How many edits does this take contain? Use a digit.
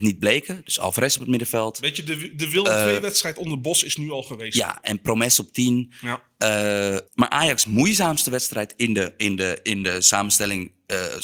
1